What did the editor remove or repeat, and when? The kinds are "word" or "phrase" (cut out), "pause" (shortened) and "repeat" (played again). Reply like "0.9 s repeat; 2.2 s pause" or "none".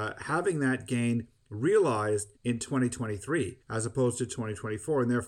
2.4 s pause; 3.6 s pause